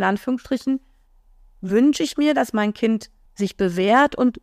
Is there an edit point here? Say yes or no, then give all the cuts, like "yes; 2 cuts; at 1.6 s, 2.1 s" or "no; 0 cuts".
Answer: no; 0 cuts